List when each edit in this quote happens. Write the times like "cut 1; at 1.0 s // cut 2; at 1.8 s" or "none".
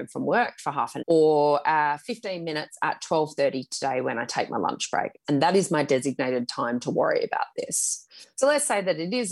cut 1; at 1.0 s